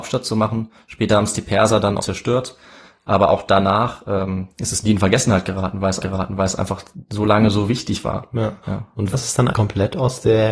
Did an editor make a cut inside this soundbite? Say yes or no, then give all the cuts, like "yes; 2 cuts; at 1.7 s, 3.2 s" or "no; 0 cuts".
yes; 6 cuts; at 2.0 s, 4.5 s, 6.0 s, 8.6 s, 9.1 s, 9.5 s